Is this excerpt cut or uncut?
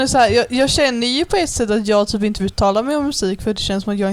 cut